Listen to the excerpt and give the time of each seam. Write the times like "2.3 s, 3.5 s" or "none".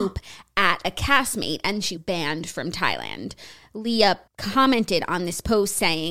2.0 s, 4.3 s